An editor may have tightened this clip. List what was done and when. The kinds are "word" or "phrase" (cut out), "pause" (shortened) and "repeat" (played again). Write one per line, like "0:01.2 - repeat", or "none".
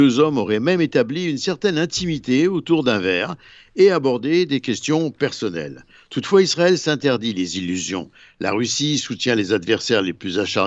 none